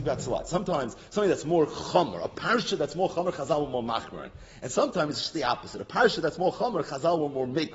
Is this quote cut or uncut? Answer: uncut